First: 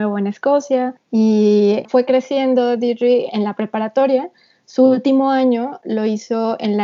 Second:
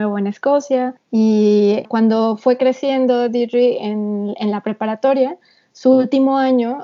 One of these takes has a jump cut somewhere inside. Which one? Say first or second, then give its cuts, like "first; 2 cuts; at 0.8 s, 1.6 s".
first; 2 cuts; at 1.9 s, 3.3 s